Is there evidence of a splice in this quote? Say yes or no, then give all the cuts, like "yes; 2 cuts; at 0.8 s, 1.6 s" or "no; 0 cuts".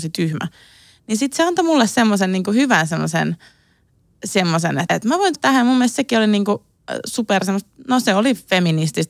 yes; 2 cuts; at 4.9 s, 5.3 s